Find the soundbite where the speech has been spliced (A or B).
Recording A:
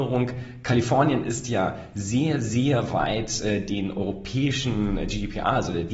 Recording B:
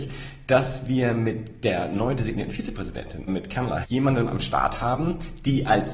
B